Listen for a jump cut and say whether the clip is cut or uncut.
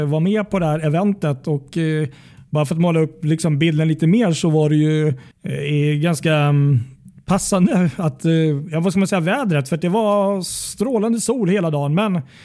cut